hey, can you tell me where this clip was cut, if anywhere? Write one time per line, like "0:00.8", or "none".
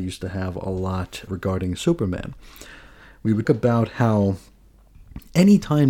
0:01.3
0:03.4